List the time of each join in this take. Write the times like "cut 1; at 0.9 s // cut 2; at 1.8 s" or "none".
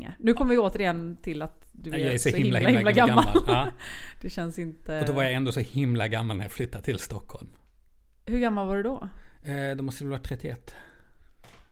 none